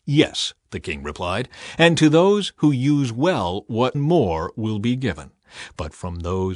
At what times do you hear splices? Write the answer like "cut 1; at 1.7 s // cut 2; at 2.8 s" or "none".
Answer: cut 1; at 3.9 s